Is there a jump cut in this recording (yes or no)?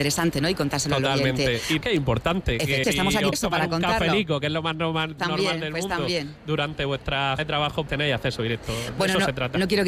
yes